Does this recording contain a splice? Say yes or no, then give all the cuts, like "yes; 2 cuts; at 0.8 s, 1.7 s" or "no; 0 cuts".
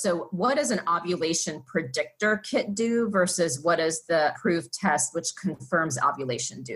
yes; 1 cut; at 4.3 s